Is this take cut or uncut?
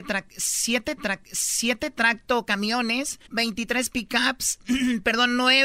cut